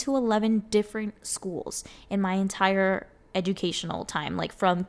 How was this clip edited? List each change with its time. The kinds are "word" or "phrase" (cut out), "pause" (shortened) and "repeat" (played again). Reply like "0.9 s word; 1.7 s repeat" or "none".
none